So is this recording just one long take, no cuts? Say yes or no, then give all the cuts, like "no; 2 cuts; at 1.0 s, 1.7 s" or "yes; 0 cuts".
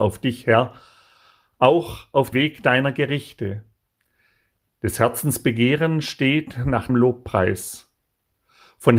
no; 2 cuts; at 2.3 s, 6.9 s